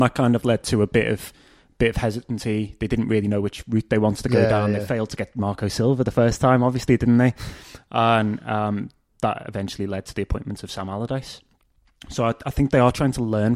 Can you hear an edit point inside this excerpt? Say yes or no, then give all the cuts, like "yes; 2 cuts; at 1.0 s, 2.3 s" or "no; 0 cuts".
no; 0 cuts